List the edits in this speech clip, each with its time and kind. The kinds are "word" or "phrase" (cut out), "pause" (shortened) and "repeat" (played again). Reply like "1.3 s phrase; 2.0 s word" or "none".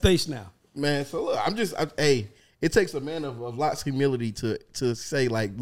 none